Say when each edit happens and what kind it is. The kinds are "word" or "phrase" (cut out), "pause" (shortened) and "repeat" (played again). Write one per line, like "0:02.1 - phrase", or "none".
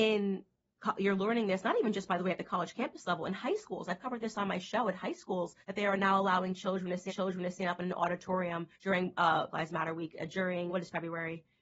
0:05.6 - pause
0:07.1 - repeat
0:08.7 - pause
0:09.5 - phrase
0:10.7 - word